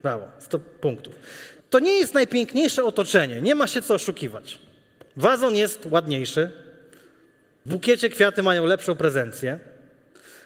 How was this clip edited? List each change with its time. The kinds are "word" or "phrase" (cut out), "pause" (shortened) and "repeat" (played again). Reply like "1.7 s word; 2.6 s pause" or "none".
1.6 s pause; 7.7 s word

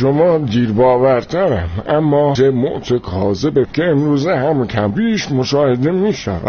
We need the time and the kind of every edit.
2.4 s word; 3.7 s word; 4.9 s word

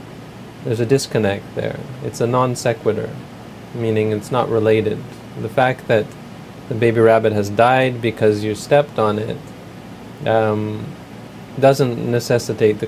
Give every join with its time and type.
none

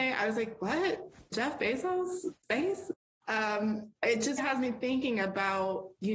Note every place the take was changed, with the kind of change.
4.0 s word; 4.4 s word

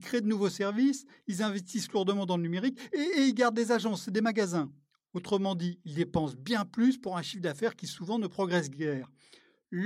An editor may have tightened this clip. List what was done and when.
none

